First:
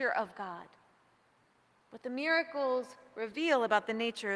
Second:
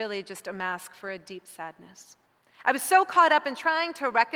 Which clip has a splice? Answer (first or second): second